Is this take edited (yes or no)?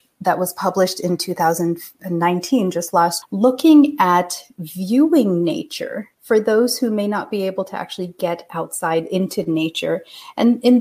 yes